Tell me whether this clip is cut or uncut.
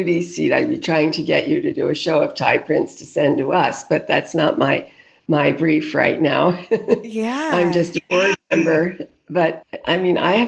uncut